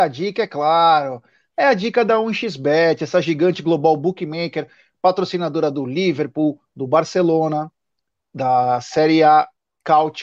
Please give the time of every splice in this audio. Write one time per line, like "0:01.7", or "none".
none